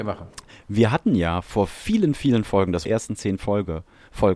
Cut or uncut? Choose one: cut